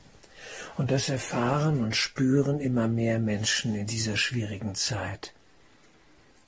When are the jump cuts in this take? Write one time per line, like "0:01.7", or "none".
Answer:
none